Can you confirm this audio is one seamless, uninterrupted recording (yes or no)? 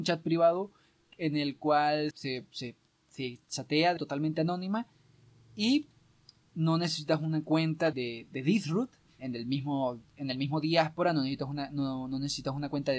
no